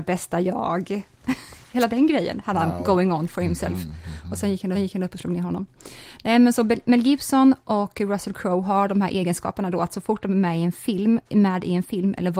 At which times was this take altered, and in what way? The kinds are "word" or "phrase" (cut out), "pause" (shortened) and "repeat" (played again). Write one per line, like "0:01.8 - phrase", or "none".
0:04.7 - repeat